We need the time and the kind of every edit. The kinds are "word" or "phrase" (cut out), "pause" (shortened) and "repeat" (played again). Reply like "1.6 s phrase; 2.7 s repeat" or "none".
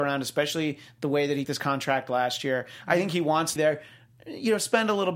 1.4 s word; 3.6 s word